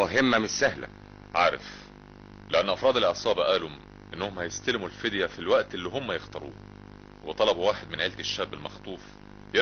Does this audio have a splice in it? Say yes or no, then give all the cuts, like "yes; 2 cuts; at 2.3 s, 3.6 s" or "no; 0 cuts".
no; 0 cuts